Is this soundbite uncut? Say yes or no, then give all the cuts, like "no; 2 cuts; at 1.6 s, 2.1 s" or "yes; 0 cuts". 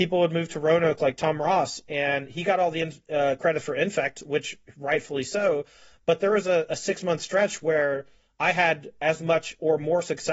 yes; 0 cuts